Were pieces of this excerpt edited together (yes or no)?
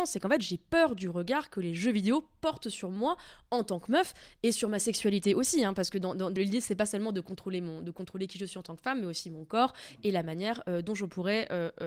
yes